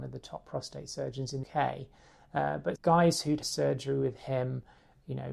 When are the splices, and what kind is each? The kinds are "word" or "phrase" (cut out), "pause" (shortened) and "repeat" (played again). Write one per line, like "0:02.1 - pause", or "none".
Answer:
0:01.4 - word
0:02.8 - word
0:03.4 - word